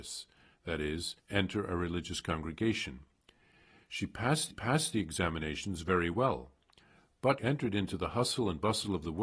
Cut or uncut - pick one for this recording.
cut